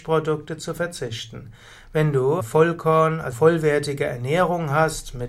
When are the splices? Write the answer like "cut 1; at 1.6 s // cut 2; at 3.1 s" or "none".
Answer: cut 1; at 2.4 s // cut 2; at 3.3 s